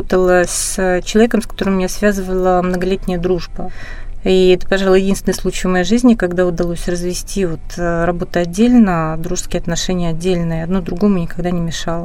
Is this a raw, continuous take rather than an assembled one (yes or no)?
yes